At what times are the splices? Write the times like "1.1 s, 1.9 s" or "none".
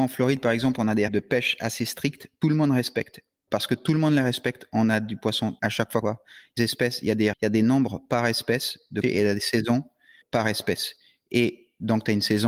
1.1 s, 2.4 s, 5.6 s, 6.0 s, 6.6 s, 7.3 s, 9.0 s, 10.2 s